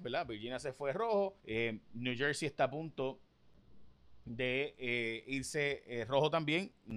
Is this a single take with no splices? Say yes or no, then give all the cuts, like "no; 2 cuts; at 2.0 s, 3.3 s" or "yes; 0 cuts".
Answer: no; 1 cut; at 1.4 s